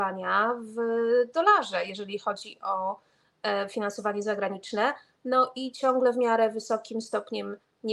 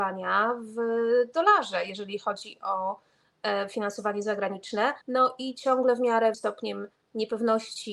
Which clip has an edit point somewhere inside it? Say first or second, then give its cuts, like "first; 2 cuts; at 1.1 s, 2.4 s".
second; 2 cuts; at 5.0 s, 6.3 s